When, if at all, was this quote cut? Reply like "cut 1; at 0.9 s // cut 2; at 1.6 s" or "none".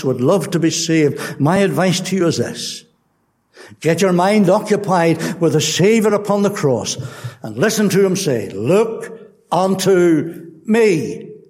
none